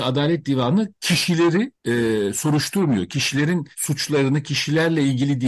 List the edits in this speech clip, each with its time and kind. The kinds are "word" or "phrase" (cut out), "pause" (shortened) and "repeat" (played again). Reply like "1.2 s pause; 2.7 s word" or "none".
1.7 s pause; 3.7 s pause